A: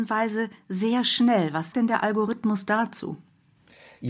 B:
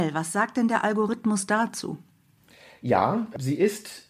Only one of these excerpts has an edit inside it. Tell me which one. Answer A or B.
A